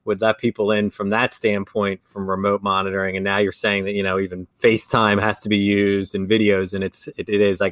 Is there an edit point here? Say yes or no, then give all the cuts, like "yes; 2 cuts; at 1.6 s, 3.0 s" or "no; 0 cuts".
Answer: yes; 1 cut; at 4.5 s